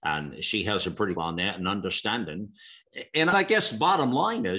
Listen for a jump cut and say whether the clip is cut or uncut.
cut